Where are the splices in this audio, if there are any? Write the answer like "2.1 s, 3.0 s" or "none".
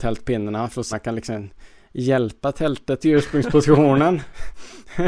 0.9 s, 3.0 s